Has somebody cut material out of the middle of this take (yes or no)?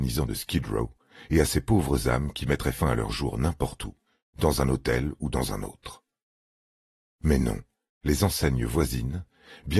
no